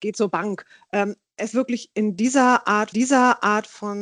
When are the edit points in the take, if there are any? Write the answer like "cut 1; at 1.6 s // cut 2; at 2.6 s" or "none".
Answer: cut 1; at 1.5 s // cut 2; at 2.9 s